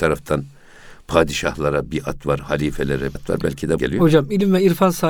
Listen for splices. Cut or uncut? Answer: cut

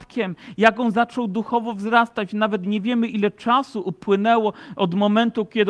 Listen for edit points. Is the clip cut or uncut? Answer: uncut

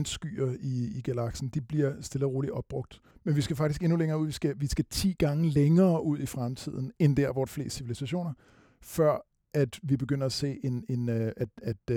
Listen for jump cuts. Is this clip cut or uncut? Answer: cut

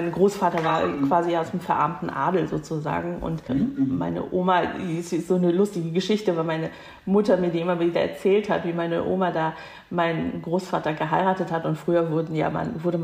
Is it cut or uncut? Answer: cut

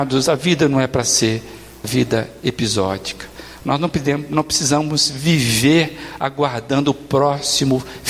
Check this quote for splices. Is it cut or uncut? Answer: cut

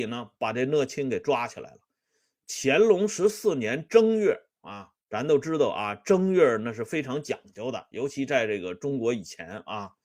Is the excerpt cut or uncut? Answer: cut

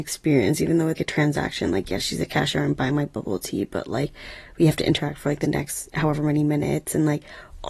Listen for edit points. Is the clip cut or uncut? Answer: cut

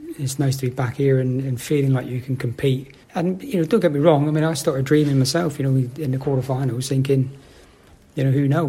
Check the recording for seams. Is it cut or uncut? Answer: cut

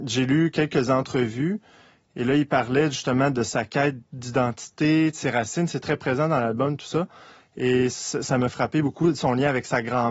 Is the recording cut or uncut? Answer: uncut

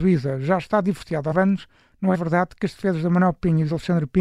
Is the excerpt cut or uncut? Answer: cut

